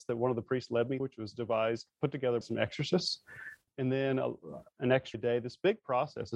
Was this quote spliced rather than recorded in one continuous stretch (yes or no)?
yes